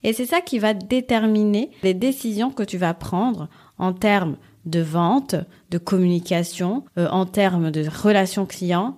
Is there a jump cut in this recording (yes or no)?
yes